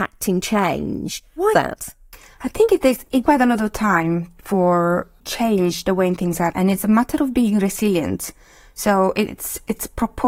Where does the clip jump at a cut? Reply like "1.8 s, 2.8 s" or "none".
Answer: 1.5 s, 3.2 s, 5.2 s, 6.5 s